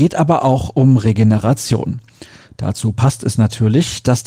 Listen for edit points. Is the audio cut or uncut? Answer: uncut